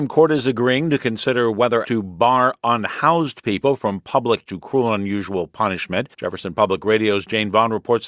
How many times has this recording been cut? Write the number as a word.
three